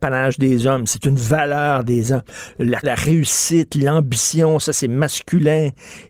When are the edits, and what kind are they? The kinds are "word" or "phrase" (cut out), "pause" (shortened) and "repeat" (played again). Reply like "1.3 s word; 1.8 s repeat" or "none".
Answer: 1.0 s word; 2.8 s word